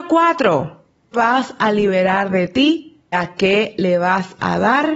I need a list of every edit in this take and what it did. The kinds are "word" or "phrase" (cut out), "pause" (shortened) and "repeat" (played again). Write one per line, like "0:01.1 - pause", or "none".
0:01.1 - word
0:03.1 - word